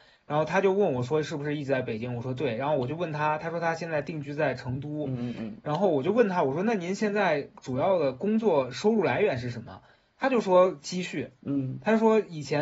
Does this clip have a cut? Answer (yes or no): no